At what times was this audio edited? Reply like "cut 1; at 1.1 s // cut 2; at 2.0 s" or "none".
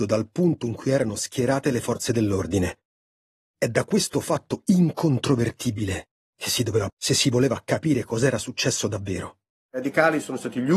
cut 1; at 6.9 s